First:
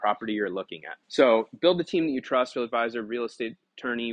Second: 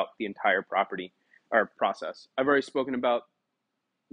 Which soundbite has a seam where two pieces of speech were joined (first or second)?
first